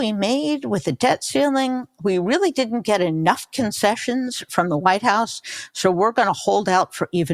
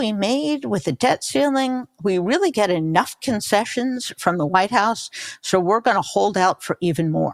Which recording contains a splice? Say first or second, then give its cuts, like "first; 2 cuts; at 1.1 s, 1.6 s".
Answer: second; 1 cut; at 2.5 s